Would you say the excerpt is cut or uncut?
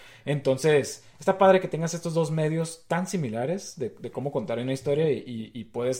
uncut